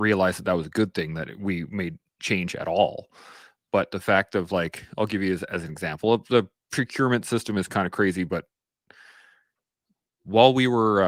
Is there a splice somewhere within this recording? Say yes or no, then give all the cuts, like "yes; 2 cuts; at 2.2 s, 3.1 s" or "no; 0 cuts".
no; 0 cuts